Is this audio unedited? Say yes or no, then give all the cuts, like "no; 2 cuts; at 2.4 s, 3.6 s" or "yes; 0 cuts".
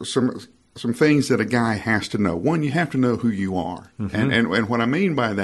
yes; 0 cuts